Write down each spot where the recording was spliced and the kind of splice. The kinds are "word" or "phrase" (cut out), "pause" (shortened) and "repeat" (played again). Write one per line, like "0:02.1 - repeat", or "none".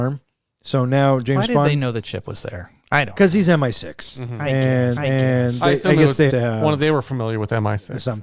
0:02.8 - pause
0:04.9 - repeat
0:06.3 - word